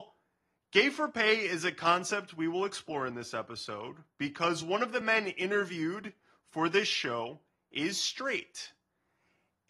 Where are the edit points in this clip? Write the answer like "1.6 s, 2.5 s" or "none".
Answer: none